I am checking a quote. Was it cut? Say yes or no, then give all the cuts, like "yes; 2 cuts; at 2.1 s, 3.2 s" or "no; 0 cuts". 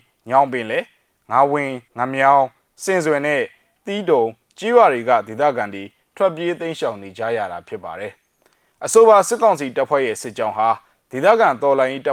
yes; 1 cut; at 1.9 s